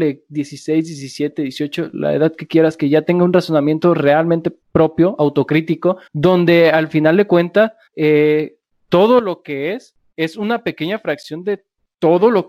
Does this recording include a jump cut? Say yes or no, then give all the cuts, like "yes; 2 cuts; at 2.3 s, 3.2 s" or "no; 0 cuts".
yes; 3 cuts; at 4.6 s, 6.1 s, 7.9 s